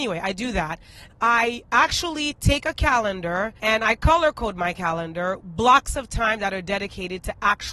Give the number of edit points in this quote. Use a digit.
3